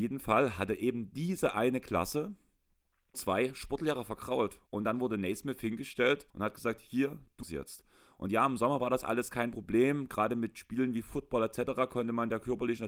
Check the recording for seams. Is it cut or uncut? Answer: cut